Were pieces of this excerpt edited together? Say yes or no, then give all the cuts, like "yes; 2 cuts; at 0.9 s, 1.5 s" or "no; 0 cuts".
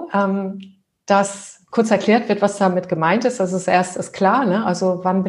no; 0 cuts